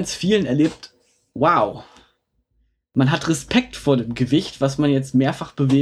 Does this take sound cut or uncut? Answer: uncut